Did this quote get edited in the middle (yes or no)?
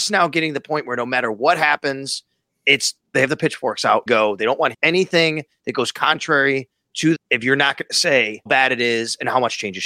yes